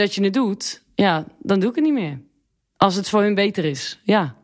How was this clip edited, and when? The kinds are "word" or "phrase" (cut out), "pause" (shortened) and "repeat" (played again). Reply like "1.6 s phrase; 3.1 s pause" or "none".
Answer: 2.5 s pause